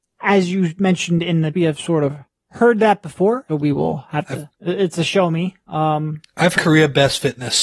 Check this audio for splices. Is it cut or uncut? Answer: cut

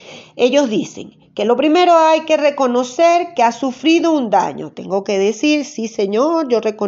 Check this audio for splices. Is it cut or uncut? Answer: uncut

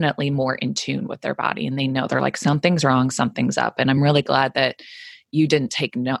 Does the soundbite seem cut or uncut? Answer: uncut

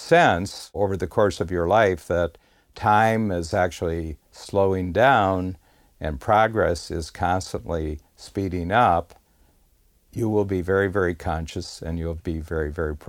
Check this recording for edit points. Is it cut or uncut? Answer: uncut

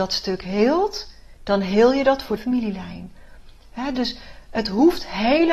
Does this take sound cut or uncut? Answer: cut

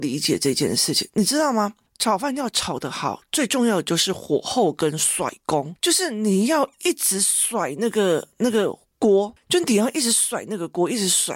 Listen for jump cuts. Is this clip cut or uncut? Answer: uncut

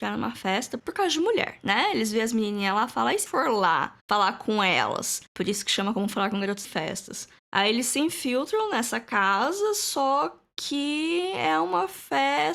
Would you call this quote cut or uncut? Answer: cut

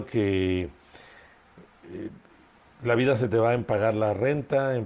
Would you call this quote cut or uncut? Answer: uncut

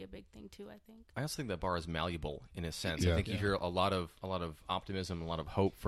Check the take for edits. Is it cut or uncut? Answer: uncut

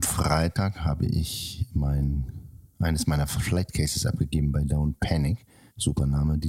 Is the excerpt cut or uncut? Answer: uncut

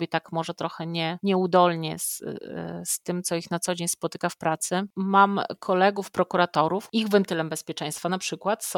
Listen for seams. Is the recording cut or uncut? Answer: uncut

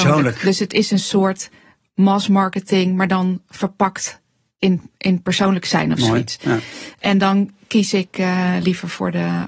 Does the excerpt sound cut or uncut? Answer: uncut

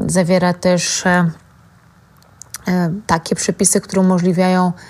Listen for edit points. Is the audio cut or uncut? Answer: cut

